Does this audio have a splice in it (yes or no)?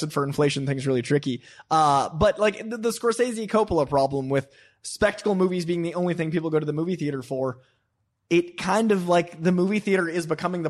no